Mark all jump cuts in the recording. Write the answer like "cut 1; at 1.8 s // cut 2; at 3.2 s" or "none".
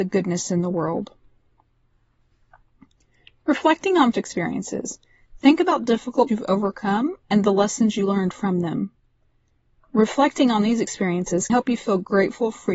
cut 1; at 4.1 s // cut 2; at 6.3 s // cut 3; at 11.5 s